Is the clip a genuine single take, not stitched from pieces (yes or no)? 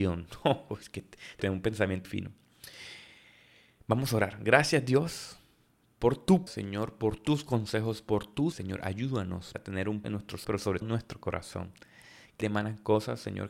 no